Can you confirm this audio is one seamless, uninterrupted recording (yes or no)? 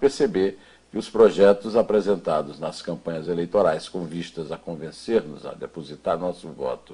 yes